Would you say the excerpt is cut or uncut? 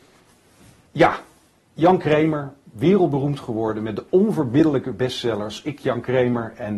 uncut